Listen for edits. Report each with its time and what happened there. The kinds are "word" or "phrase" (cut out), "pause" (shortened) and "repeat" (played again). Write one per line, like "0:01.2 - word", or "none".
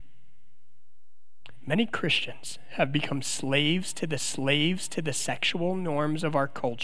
0:04.2 - repeat